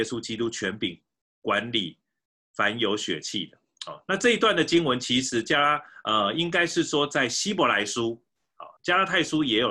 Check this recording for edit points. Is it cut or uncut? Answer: cut